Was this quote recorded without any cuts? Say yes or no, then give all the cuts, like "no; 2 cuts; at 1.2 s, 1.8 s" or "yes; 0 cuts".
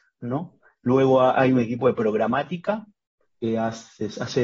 yes; 0 cuts